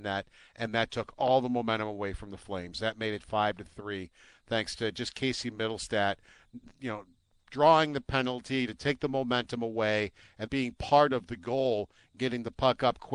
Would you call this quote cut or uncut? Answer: cut